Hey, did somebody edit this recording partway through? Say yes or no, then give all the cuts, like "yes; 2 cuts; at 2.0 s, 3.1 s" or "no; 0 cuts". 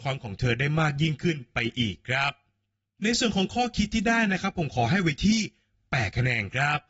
no; 0 cuts